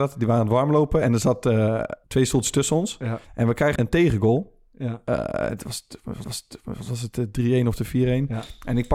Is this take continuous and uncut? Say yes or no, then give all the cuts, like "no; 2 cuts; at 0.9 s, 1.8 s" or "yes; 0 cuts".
no; 4 cuts; at 2.0 s, 3.2 s, 3.8 s, 6.2 s